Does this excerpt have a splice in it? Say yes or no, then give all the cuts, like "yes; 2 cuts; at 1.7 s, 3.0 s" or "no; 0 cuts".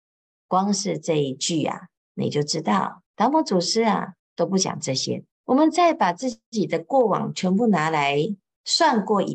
yes; 4 cuts; at 2.0 s, 3.1 s, 4.2 s, 5.3 s